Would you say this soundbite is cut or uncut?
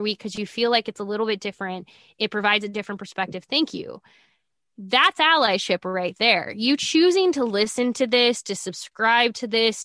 uncut